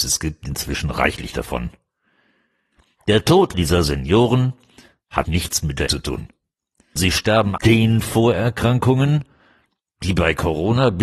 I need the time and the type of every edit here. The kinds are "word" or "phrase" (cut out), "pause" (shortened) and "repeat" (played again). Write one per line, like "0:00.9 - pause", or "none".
0:03.5 - word
0:05.3 - word
0:05.9 - word
0:07.0 - word
0:07.6 - word